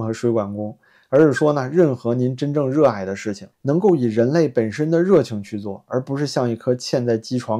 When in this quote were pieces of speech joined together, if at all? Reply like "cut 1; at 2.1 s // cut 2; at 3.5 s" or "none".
cut 1; at 3.5 s